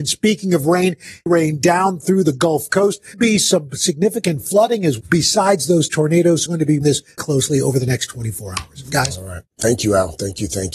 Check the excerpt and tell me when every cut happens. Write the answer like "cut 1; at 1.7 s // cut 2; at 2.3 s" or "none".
cut 1; at 1.3 s // cut 2; at 3.1 s // cut 3; at 5.0 s // cut 4; at 6.5 s // cut 5; at 6.8 s // cut 6; at 7.2 s